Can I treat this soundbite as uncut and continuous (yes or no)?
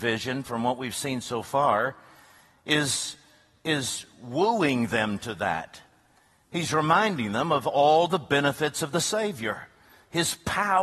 yes